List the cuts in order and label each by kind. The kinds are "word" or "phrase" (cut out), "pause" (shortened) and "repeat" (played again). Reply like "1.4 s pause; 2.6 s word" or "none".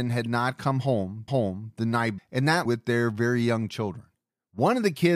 1.3 s repeat; 2.2 s word; 2.6 s phrase